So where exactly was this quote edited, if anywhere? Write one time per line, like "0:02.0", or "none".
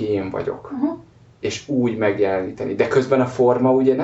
none